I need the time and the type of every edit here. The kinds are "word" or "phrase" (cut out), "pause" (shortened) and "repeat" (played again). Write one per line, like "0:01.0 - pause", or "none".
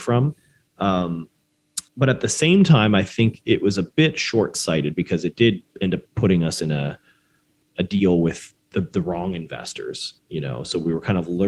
0:01.9 - pause
0:03.4 - word
0:05.7 - pause
0:06.1 - pause
0:07.7 - word
0:08.6 - pause
0:10.2 - pause